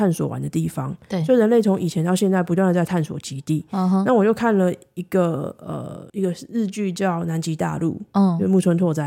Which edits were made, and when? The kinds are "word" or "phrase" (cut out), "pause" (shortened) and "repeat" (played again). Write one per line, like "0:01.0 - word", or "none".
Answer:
0:06.1 - pause

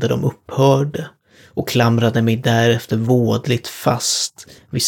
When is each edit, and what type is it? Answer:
none

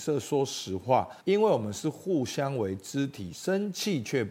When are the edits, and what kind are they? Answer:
0:01.2 - pause

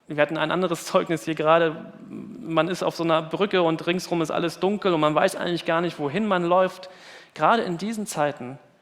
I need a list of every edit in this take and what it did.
none

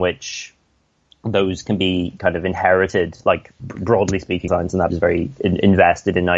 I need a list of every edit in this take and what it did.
0:01.6 - word
0:03.6 - word
0:04.5 - word
0:04.9 - word

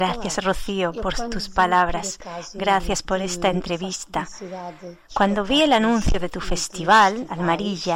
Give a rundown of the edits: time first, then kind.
none

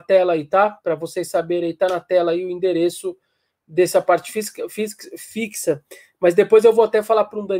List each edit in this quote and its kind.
none

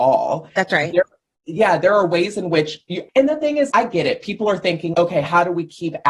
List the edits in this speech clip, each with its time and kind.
0:03.1 - word
0:03.7 - word
0:04.9 - word

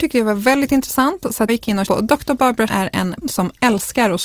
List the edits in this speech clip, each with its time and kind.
0:01.5 - word
0:01.9 - word
0:02.7 - word
0:03.2 - word

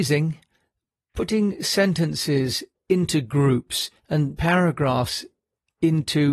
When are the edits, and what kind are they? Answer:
none

